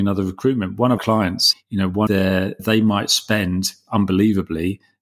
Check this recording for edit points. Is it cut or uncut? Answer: cut